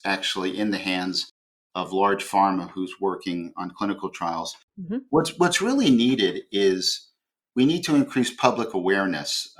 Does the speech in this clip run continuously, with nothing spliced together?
yes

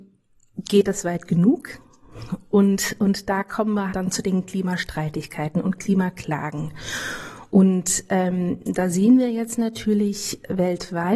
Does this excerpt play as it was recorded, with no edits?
no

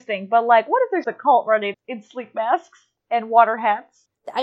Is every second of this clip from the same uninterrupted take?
no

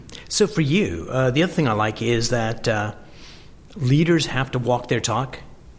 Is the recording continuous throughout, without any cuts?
yes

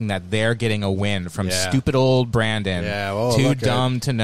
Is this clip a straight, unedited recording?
yes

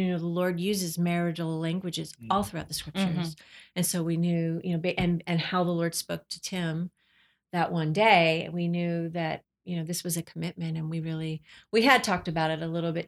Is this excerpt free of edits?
no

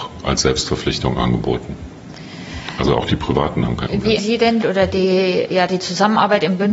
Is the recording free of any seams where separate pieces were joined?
no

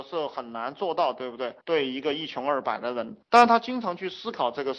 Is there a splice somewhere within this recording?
yes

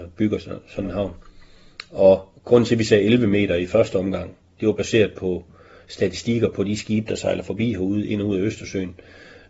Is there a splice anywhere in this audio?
no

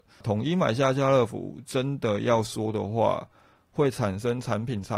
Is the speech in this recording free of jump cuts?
yes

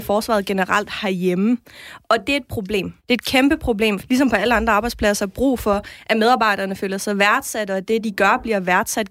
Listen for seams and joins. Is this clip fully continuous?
no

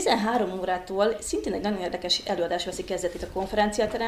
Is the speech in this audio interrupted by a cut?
no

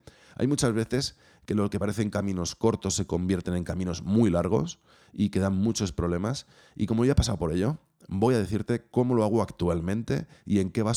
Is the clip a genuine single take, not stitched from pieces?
yes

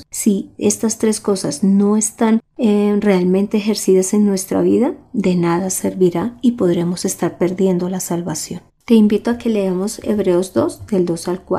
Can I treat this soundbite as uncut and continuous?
no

